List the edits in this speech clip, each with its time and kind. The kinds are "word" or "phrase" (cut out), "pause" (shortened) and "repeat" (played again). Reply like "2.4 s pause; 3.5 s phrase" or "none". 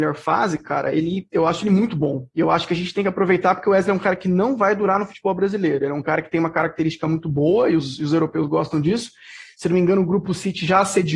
none

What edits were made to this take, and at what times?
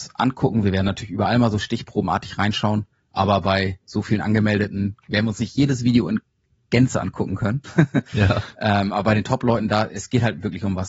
none

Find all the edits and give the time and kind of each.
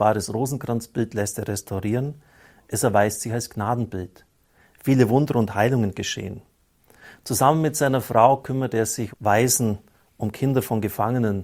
9.1 s word

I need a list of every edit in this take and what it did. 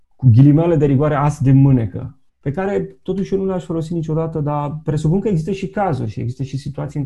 2.3 s pause

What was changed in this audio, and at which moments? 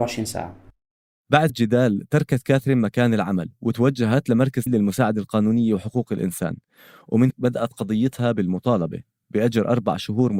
1.5 s word; 4.7 s word; 7.3 s word

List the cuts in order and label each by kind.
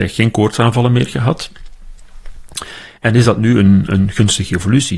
none

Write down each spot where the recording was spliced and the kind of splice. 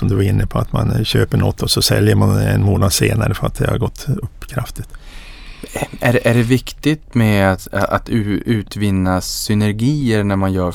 none

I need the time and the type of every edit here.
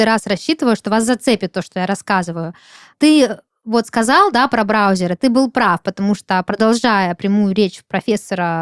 none

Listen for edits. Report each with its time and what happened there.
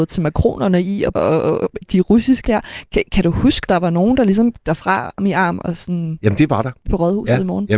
1.1 s word; 1.8 s word; 2.4 s word; 3.7 s word; 4.6 s word; 5.2 s word; 6.9 s word

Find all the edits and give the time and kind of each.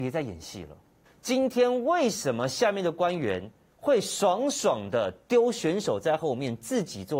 1.1 s pause; 3.7 s pause

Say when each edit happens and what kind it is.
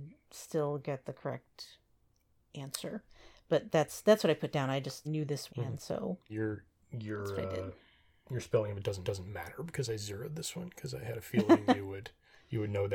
5.0 s phrase; 5.5 s phrase; 6.3 s word; 9.0 s repeat

